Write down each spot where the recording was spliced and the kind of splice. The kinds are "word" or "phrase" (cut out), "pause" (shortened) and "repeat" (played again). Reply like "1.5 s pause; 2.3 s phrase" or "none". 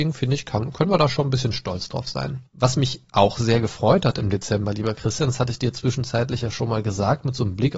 2.5 s pause